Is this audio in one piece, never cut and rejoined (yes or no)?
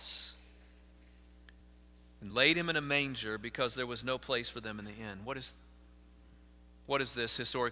yes